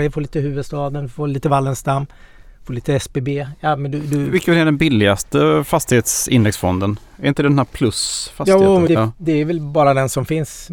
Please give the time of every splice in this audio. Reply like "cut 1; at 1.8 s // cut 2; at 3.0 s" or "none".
cut 1; at 8.9 s